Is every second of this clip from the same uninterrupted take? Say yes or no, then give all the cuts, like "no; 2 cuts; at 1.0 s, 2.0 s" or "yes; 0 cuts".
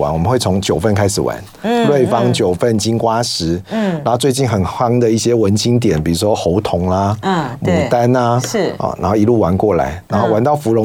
yes; 0 cuts